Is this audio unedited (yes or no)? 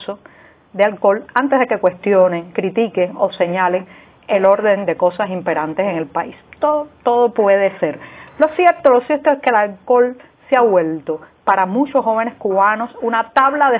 yes